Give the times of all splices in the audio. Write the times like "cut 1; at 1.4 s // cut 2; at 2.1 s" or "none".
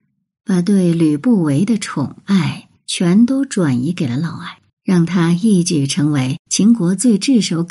cut 1; at 4.7 s